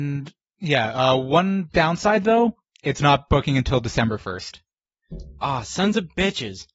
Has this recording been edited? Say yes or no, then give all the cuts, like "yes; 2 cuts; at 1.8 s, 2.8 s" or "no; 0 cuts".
no; 0 cuts